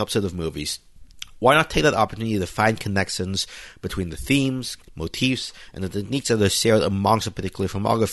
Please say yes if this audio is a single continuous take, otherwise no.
yes